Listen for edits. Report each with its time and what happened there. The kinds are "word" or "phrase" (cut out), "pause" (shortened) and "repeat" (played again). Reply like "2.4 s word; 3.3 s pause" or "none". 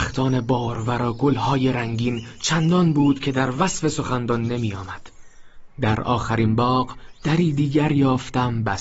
none